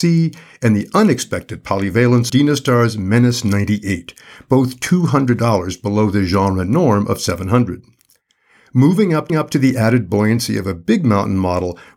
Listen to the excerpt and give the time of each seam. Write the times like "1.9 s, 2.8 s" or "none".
2.3 s, 9.3 s